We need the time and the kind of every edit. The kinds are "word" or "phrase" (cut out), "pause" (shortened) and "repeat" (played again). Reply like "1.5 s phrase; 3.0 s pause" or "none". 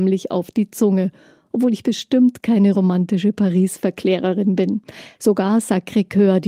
none